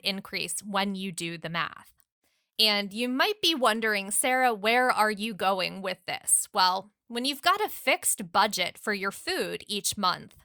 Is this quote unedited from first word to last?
yes; 0 cuts

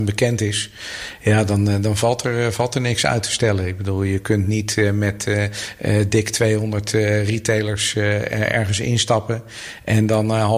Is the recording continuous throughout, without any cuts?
yes; 0 cuts

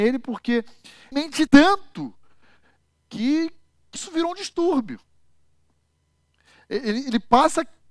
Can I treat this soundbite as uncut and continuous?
no; 3 cuts; at 1.1 s, 1.5 s, 4.0 s

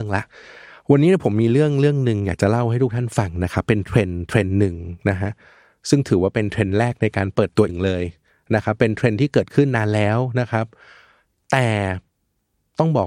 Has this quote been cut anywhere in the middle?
yes; 1 cut; at 7.7 s

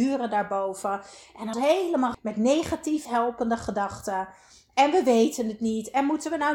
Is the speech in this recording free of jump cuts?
no; 3 cuts; at 1.5 s, 2.1 s, 3.1 s

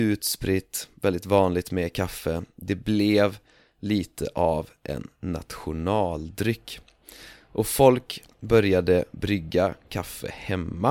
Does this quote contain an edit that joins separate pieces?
no; 0 cuts

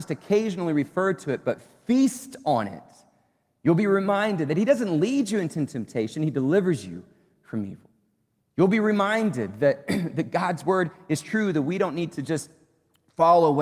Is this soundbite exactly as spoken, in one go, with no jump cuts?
yes; 0 cuts

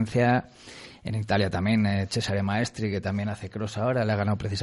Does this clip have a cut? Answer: no; 0 cuts

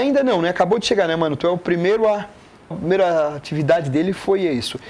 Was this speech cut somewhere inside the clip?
yes; 1 cut; at 2.7 s

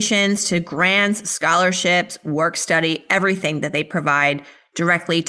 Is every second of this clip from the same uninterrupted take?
yes; 0 cuts

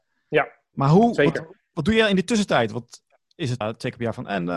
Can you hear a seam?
yes; 1 cut; at 3.6 s

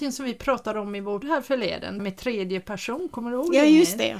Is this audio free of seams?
no; 2 cuts; at 1.2 s, 2.0 s

